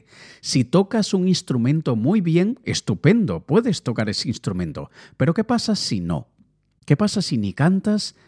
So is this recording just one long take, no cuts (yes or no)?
yes